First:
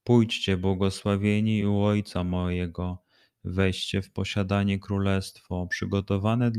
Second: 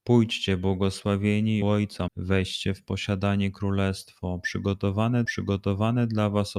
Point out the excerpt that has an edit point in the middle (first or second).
second